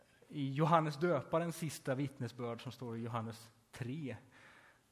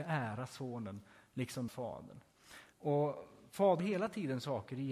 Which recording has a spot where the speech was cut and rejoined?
second; 3 cuts; at 1.7 s, 2.7 s, 3.8 s

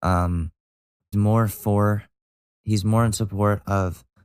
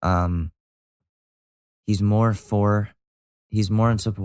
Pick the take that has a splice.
first; 1 cut; at 1.1 s

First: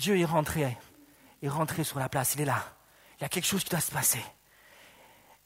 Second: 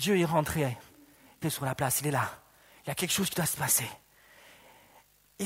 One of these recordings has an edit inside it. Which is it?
second; 1 cut; at 1.4 s

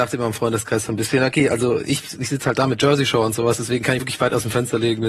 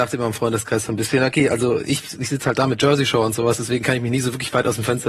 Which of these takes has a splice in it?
first; 1 cut; at 4.0 s

